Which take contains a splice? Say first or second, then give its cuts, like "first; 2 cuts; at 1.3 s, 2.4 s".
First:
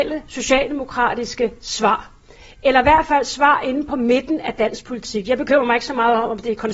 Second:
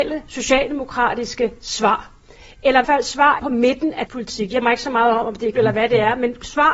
second; 5 cuts; at 2.8 s, 3.4 s, 4.1 s, 4.6 s, 5.5 s